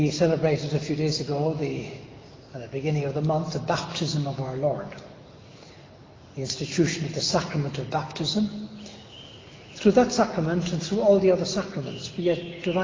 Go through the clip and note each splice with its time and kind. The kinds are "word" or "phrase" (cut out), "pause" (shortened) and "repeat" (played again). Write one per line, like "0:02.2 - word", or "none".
none